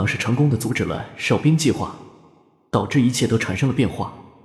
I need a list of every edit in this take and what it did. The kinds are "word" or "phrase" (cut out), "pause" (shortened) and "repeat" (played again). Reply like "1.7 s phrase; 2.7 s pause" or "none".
none